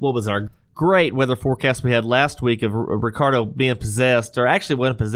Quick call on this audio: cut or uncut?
uncut